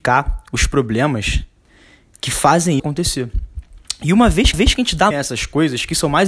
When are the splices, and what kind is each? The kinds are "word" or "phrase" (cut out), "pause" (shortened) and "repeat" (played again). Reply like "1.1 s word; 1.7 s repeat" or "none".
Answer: 2.1 s word; 2.8 s word; 4.5 s repeat; 5.1 s word